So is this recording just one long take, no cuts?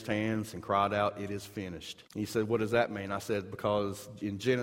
no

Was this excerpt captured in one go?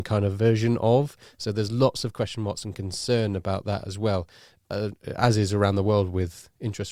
yes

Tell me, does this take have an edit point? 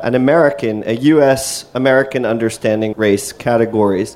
yes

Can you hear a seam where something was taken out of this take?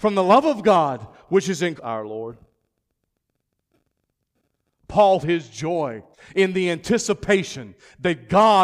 yes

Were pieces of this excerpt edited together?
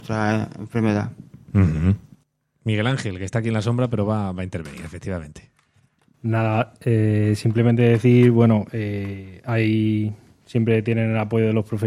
no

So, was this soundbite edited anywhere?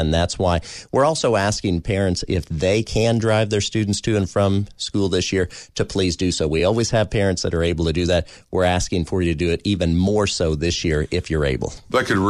no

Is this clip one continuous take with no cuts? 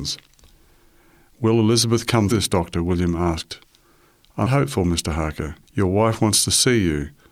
no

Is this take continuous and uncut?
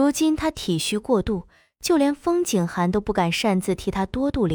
yes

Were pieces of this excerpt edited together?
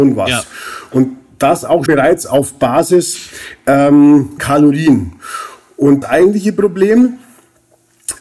yes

